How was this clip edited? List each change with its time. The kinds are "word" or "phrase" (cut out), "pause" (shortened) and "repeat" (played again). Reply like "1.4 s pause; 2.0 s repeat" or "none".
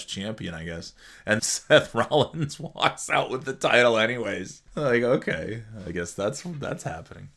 1.4 s word; 4.7 s pause